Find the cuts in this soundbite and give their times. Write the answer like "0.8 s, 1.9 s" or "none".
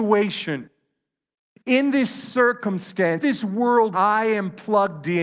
3.2 s, 3.9 s